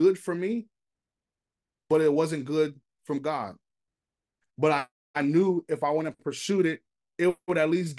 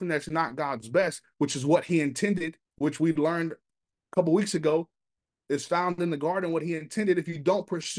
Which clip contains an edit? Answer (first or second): second